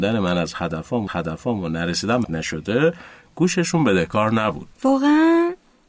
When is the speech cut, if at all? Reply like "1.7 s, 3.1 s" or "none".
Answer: 1.1 s, 2.2 s, 4.7 s